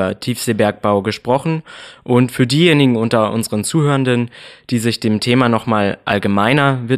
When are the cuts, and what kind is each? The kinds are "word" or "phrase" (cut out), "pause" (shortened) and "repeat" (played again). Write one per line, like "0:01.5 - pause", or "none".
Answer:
none